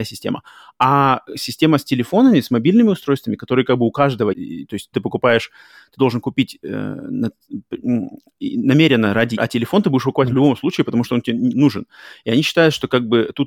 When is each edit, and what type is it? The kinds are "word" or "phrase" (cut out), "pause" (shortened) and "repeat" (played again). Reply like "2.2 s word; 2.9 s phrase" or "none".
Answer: 4.3 s phrase; 4.9 s word; 9.4 s word